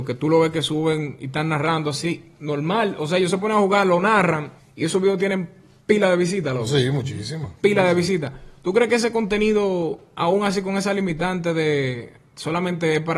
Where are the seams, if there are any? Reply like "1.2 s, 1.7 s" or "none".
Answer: 4.6 s, 7.6 s